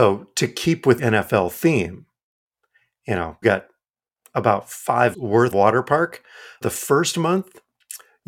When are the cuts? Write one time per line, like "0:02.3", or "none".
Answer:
0:01.0
0:03.4
0:05.1
0:05.5
0:06.6